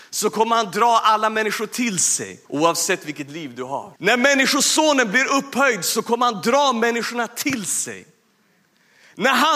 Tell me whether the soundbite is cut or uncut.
cut